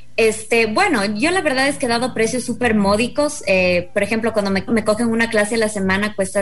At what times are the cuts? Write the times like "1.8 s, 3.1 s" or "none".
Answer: 4.7 s